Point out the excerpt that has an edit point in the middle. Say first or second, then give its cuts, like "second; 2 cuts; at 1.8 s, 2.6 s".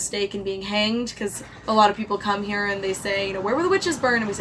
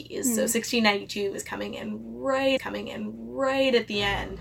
second; 1 cut; at 2.6 s